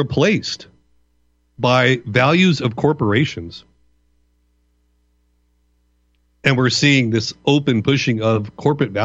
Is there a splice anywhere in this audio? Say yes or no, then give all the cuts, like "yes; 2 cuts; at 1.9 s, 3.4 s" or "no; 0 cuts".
no; 0 cuts